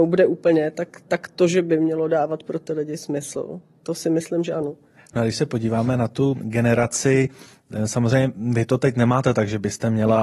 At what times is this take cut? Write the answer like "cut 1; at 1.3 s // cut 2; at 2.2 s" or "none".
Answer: cut 1; at 3.8 s // cut 2; at 6.4 s